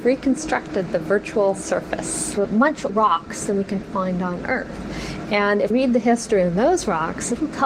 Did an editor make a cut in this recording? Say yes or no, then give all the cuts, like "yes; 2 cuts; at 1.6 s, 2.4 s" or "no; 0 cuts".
yes; 4 cuts; at 2.4 s, 2.9 s, 3.8 s, 5.7 s